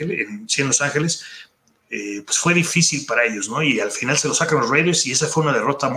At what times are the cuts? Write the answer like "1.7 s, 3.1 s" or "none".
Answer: none